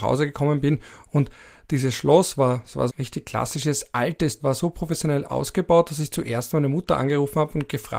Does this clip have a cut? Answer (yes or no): yes